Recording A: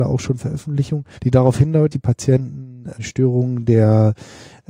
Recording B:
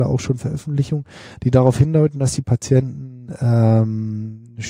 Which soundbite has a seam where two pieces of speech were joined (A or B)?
A